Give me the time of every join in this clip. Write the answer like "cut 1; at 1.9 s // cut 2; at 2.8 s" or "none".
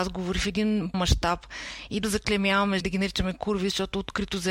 cut 1; at 0.9 s // cut 2; at 2.0 s // cut 3; at 2.8 s